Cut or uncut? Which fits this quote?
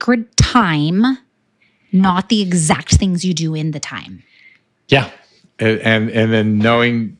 uncut